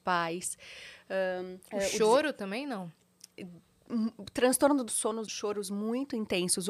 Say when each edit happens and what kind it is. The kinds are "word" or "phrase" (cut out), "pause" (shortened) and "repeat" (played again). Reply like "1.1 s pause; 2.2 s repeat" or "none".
1.6 s pause; 4.9 s phrase; 5.3 s phrase